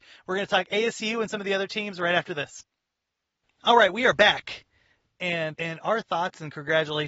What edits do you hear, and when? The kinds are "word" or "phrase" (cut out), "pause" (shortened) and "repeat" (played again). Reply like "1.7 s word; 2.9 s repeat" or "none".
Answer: 5.5 s word